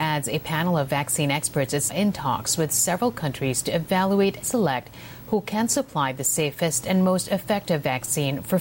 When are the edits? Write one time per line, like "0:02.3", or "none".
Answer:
0:01.9
0:04.4